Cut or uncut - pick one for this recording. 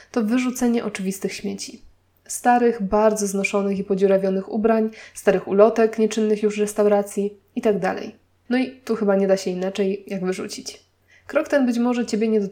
uncut